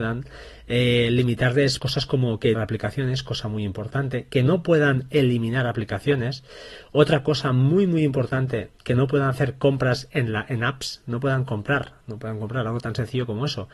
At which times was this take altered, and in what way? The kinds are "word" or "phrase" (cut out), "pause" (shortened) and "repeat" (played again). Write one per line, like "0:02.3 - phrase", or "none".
0:01.8 - word
0:02.5 - phrase
0:12.0 - pause